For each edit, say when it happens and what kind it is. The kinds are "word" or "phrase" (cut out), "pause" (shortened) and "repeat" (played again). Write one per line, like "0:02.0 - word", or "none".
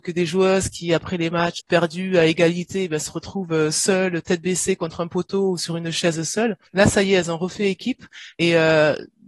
0:01.6 - word
0:06.7 - pause